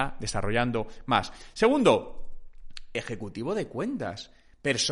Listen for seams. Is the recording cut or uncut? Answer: uncut